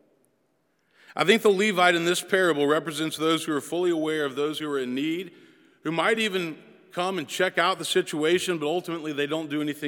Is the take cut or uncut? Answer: uncut